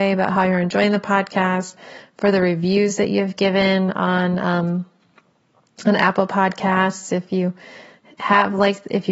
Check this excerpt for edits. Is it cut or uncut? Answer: uncut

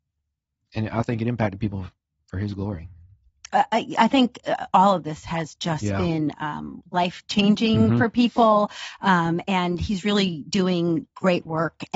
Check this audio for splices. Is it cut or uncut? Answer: uncut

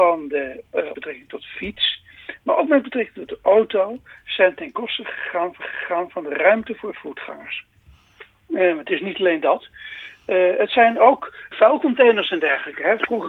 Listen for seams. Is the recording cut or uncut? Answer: cut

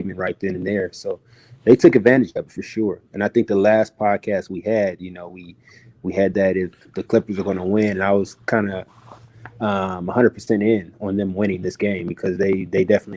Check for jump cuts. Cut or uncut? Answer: uncut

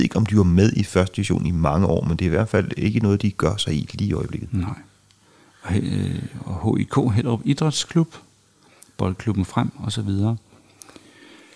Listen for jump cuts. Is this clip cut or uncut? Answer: uncut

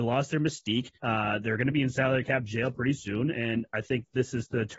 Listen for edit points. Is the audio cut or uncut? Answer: cut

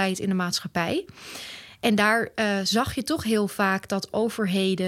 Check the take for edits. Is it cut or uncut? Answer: uncut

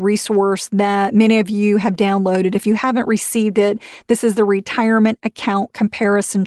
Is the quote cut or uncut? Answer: uncut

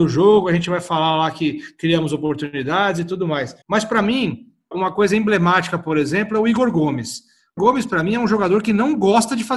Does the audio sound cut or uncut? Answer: cut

